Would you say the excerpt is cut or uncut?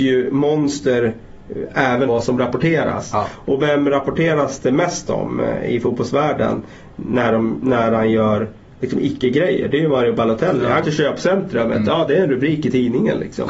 cut